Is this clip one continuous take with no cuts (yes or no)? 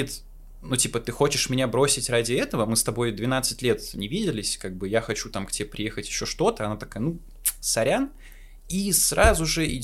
yes